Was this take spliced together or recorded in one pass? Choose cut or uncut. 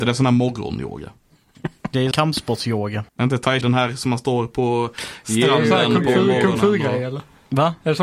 cut